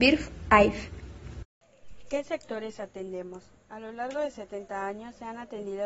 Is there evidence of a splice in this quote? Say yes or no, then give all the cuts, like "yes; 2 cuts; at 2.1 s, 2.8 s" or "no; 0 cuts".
no; 0 cuts